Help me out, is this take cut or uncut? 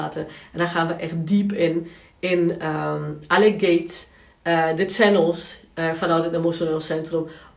uncut